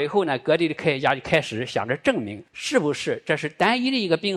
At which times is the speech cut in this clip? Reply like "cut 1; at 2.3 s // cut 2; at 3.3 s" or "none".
cut 1; at 2.5 s